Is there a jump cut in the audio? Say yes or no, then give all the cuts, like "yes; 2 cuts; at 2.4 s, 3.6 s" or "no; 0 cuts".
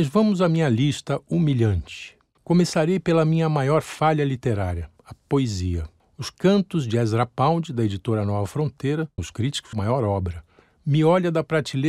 yes; 2 cuts; at 9.2 s, 9.7 s